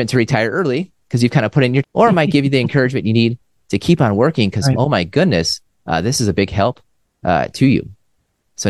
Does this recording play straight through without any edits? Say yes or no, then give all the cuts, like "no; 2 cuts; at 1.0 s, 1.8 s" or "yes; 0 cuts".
no; 1 cut; at 1.8 s